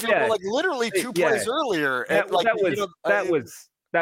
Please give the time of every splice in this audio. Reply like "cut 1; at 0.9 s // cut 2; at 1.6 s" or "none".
cut 1; at 3.0 s